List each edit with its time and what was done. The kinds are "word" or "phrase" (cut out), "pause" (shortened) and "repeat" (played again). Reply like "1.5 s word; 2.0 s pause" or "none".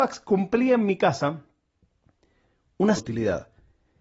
3.0 s word